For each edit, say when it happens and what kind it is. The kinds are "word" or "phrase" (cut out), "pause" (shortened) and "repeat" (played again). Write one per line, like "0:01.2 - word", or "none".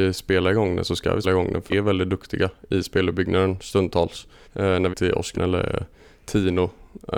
0:01.2 - word
0:01.7 - phrase
0:04.4 - pause
0:04.9 - phrase
0:05.3 - word